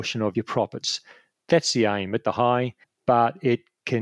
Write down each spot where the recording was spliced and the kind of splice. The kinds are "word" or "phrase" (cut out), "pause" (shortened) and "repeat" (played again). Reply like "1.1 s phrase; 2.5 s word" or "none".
2.2 s phrase; 2.8 s pause